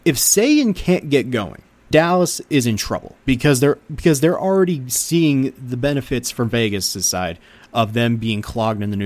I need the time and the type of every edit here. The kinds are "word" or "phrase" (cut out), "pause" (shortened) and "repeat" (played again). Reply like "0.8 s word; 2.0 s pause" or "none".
1.9 s word; 3.2 s pause